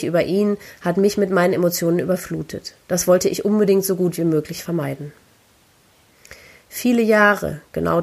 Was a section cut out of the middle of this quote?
no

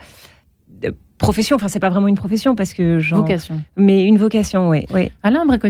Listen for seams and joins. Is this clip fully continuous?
yes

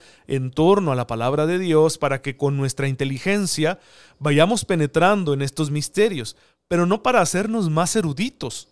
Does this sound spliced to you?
no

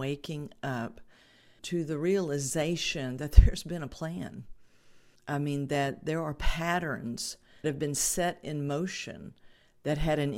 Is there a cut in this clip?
yes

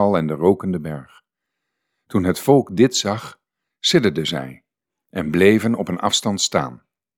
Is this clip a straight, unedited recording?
yes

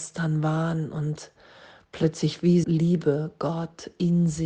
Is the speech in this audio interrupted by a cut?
yes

